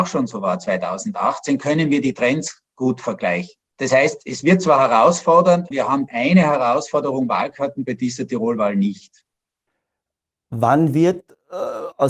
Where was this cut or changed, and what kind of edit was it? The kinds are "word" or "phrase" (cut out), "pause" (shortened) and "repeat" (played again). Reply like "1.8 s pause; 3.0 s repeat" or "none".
3.7 s pause; 5.7 s word; 6.1 s word